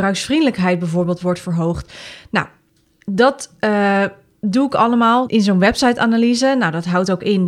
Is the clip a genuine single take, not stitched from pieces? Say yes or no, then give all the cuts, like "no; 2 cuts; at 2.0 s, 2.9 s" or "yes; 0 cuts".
yes; 0 cuts